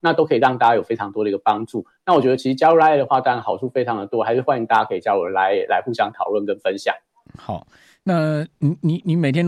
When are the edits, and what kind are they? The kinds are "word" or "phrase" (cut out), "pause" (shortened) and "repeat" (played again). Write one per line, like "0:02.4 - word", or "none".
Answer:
none